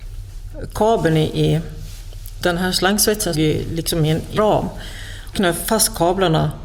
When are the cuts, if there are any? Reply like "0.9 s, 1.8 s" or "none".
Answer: 2.4 s, 3.3 s, 4.4 s, 5.3 s